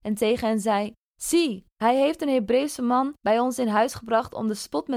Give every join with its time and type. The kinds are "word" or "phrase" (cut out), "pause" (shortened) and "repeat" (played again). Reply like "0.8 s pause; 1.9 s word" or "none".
none